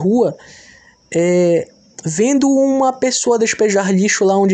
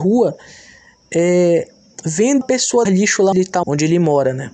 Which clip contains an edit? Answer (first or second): second